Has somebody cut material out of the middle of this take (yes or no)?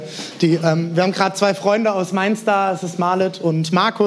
no